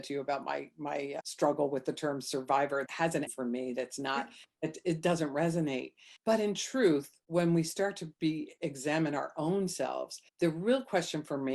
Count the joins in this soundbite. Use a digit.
5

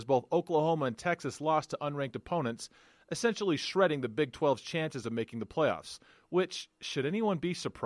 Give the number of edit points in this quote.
0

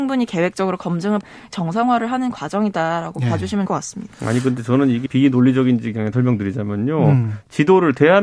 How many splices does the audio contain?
5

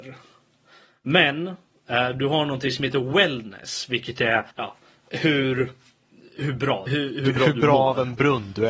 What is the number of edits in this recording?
2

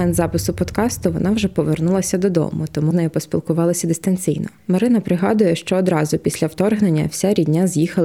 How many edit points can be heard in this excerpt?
2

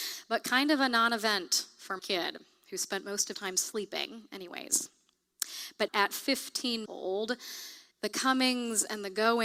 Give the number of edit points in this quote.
5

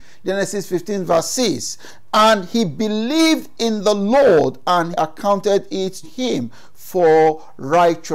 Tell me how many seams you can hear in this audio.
2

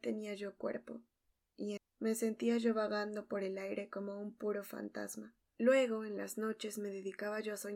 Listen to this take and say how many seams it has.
1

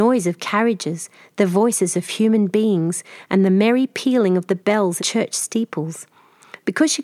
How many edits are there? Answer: 1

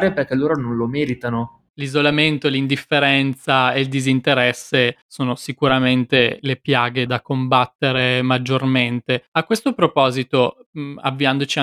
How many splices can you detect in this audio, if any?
5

